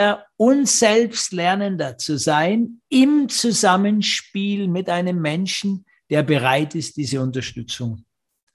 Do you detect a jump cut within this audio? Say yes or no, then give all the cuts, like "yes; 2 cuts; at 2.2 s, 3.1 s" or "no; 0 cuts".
no; 0 cuts